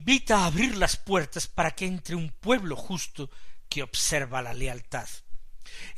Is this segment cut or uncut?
uncut